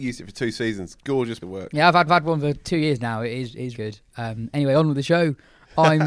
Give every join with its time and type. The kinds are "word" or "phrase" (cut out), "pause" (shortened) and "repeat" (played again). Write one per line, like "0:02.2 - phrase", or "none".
0:01.4 - word
0:02.1 - repeat
0:03.7 - phrase

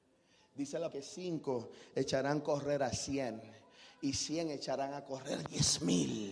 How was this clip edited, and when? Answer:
0:00.9 - word

